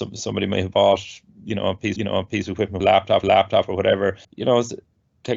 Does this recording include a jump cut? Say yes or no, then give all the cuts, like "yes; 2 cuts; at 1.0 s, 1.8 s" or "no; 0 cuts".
yes; 4 cuts; at 2.0 s, 2.8 s, 3.2 s, 4.2 s